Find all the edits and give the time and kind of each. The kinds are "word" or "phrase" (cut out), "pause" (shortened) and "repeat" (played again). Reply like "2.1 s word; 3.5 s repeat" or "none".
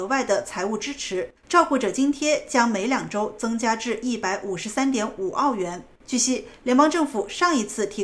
1.4 s pause; 6.0 s pause